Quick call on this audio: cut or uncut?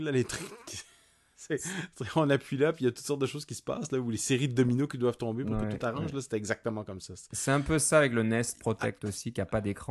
uncut